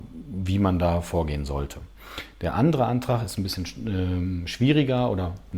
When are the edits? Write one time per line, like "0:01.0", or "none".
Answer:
none